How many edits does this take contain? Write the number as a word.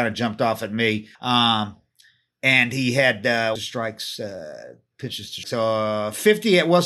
three